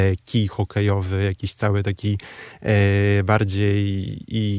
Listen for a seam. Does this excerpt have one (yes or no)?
no